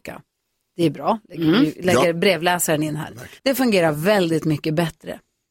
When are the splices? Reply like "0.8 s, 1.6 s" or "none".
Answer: 3.4 s